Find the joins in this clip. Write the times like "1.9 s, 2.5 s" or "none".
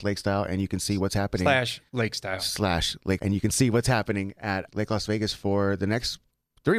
1.9 s, 3.2 s, 4.7 s